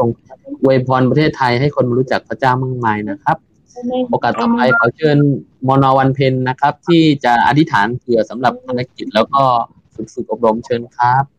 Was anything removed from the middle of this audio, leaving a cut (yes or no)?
no